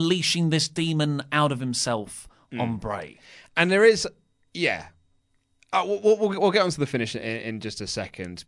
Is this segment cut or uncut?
uncut